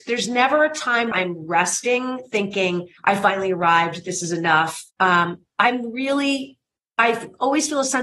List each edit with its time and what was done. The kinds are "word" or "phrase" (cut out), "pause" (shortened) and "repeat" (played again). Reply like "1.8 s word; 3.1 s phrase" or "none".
1.1 s word; 3.0 s pause; 4.9 s pause